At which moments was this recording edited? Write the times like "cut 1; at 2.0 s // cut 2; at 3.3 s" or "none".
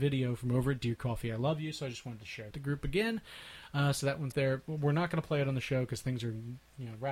cut 1; at 2.5 s // cut 2; at 4.3 s